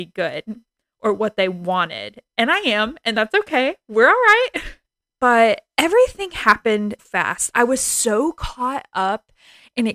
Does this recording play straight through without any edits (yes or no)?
no